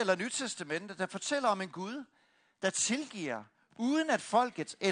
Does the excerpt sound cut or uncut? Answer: uncut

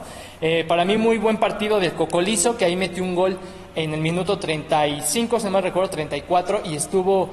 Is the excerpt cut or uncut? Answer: uncut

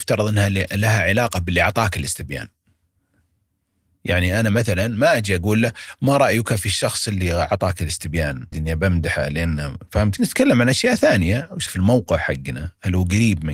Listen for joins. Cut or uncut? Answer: cut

